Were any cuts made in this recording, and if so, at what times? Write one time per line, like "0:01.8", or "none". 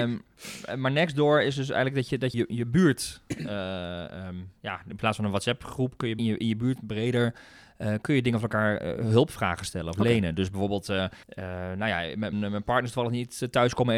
0:02.3
0:06.2
0:11.2
0:12.3